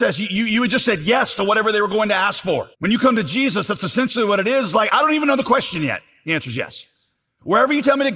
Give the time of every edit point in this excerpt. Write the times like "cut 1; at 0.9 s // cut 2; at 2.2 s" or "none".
cut 1; at 2.7 s // cut 2; at 4.9 s